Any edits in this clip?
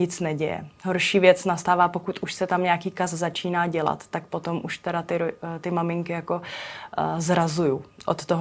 no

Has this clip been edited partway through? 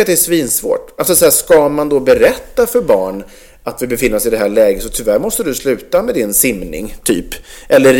no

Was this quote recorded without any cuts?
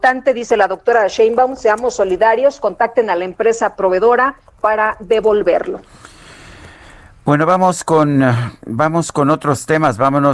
yes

